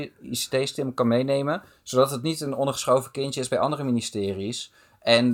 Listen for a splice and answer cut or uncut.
uncut